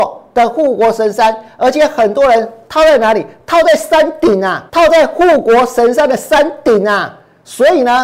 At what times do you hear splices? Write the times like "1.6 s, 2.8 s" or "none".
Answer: 4.7 s